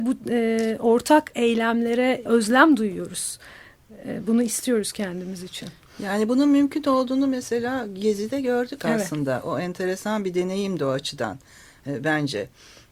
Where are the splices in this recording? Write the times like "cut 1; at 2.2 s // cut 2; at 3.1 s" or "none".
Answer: cut 1; at 2.3 s